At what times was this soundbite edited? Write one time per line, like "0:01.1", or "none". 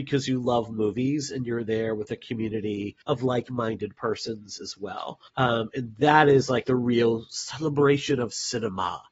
0:03.0
0:05.3
0:06.6